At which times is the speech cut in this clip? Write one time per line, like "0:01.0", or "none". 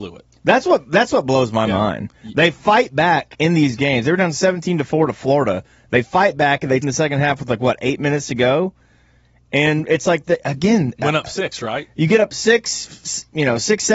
0:06.8